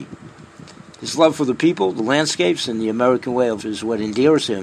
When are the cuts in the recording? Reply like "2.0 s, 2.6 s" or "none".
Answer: 3.6 s